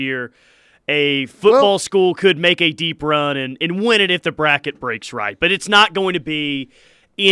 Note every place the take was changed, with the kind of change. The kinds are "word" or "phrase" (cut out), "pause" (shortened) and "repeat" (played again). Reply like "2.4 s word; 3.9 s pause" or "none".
none

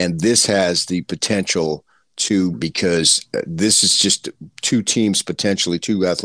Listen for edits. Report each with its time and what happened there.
2.5 s phrase

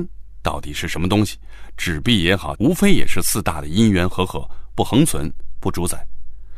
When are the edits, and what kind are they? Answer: 2.5 s phrase

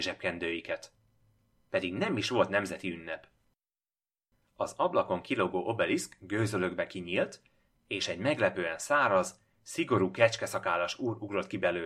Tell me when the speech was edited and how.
none

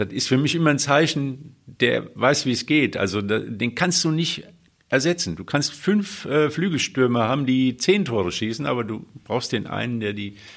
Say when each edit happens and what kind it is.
none

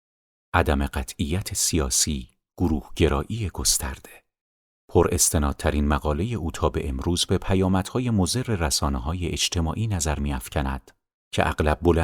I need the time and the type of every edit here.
none

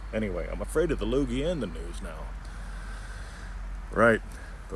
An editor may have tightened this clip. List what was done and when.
none

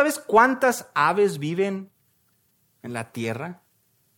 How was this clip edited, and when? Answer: none

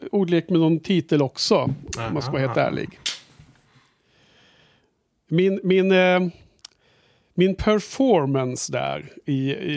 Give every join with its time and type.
none

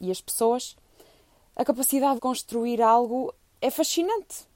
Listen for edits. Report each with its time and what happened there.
2.2 s word; 3.5 s word

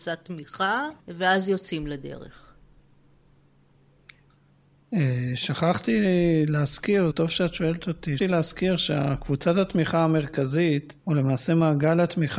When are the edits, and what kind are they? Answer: 1.0 s pause; 7.1 s word; 8.2 s word; 11.0 s pause

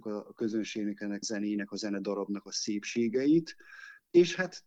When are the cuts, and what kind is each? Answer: 1.2 s word

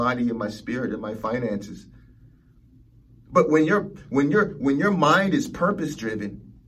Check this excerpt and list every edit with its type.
none

